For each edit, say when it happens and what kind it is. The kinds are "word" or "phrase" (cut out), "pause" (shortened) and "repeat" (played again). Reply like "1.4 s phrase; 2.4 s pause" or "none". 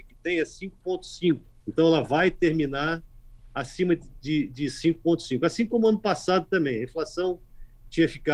1.5 s pause